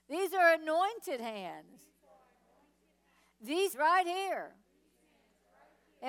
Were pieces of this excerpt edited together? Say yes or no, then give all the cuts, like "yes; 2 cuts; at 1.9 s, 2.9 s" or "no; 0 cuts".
yes; 1 cut; at 3.7 s